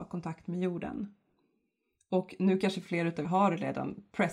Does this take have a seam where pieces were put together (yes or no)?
yes